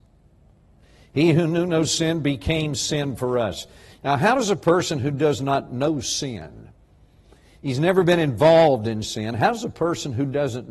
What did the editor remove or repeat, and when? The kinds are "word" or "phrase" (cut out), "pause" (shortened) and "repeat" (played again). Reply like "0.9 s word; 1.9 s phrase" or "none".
none